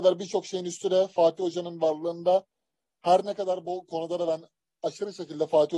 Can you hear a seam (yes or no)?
no